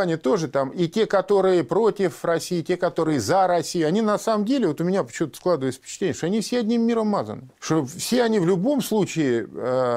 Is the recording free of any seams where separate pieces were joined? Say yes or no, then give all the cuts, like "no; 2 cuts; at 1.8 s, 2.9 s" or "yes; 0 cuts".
no; 1 cut; at 7.5 s